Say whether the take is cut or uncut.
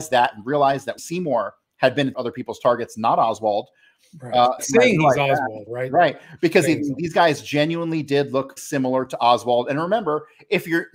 cut